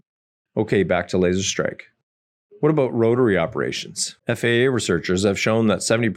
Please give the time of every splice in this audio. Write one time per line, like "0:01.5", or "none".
0:04.2